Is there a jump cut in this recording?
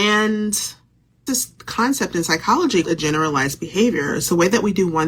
yes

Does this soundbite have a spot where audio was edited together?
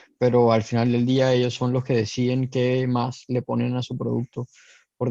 no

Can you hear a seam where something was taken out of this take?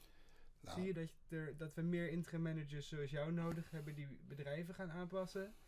yes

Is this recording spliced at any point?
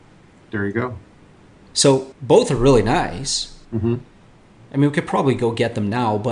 yes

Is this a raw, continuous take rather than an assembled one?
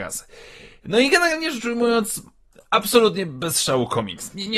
yes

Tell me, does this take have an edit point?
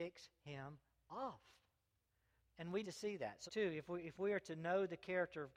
yes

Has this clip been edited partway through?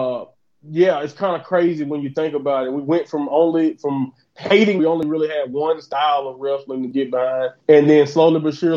yes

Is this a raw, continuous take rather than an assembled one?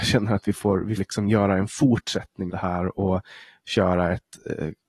no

